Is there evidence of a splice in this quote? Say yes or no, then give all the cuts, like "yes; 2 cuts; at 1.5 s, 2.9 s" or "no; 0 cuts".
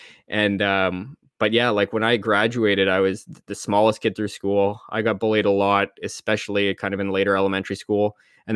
yes; 1 cut; at 3.4 s